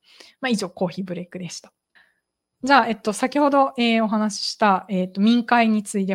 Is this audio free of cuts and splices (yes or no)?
no